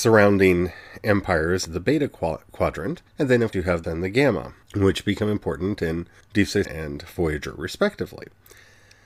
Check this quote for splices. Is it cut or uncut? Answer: cut